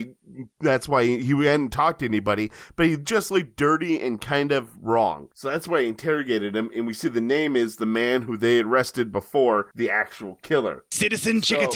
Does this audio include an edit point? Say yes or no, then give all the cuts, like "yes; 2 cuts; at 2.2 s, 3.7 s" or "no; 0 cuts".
no; 0 cuts